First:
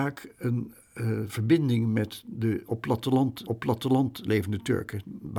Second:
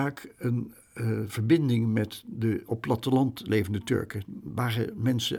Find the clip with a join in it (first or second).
first